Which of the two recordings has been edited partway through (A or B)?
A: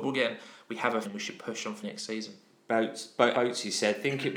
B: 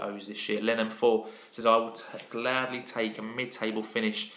A